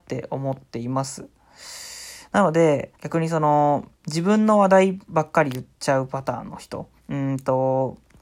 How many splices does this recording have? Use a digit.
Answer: 4